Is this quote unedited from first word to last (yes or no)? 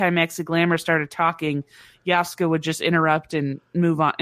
yes